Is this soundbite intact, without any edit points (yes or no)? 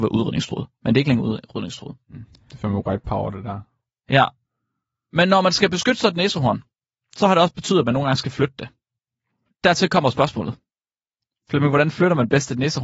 yes